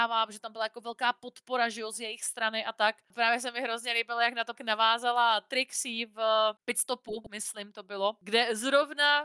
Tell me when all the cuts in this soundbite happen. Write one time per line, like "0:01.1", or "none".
0:04.6